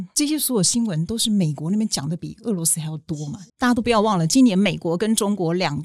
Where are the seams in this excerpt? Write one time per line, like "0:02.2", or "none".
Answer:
0:03.5